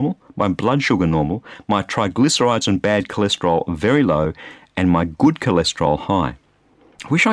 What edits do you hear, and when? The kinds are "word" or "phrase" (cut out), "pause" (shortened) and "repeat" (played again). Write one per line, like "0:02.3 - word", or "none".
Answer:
none